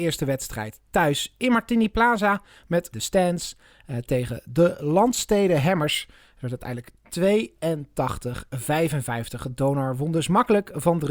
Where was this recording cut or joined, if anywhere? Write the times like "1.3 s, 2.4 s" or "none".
2.9 s